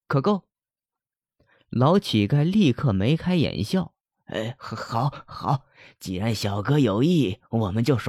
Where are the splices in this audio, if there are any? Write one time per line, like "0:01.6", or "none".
none